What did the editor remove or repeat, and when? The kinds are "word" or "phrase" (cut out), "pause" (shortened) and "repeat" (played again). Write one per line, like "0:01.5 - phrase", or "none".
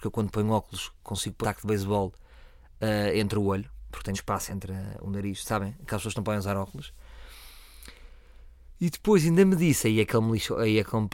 0:01.4 - word
0:04.1 - word
0:04.5 - word